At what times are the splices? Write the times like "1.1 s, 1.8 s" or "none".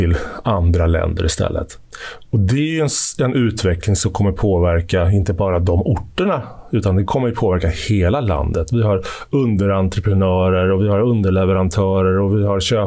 none